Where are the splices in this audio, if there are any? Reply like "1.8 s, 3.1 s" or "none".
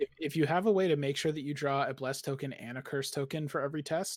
none